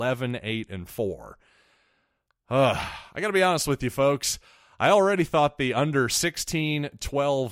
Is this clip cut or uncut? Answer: uncut